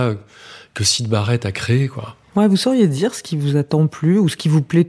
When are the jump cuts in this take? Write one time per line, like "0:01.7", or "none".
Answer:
none